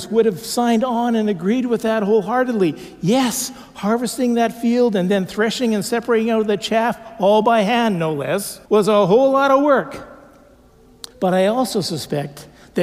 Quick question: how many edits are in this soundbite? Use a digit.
2